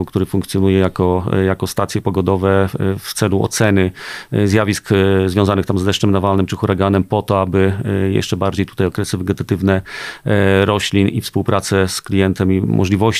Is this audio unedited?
yes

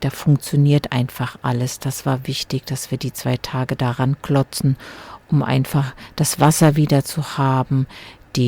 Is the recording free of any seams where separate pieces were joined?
yes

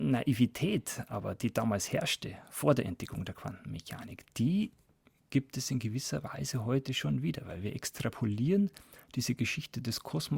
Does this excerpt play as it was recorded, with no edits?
yes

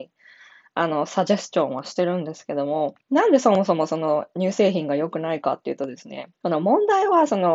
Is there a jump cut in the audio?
yes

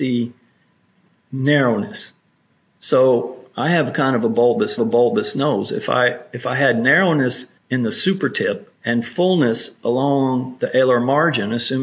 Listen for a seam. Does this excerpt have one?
yes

